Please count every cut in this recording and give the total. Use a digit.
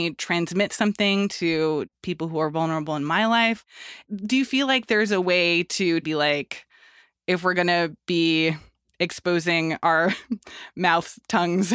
1